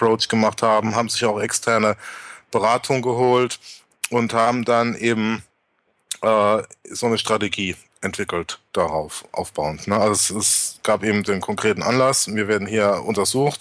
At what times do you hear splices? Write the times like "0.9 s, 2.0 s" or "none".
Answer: none